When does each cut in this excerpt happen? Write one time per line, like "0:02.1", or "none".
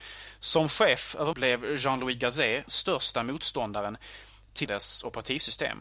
0:01.3
0:02.7
0:04.7

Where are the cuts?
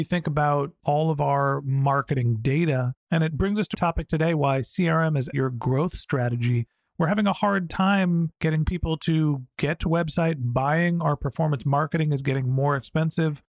0:03.7
0:05.3
0:09.9

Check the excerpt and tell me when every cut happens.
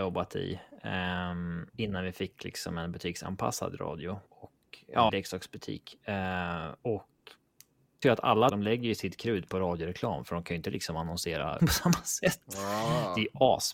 0:01.7
0:04.3
0:05.1
0:06.8
0:08.0
0:08.5
0:11.6

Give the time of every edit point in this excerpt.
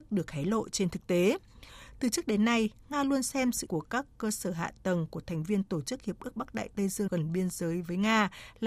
0:03.7
0:07.1

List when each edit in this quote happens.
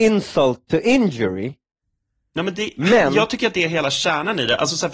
none

